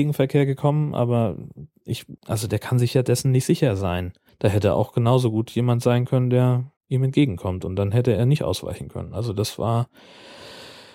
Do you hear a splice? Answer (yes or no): yes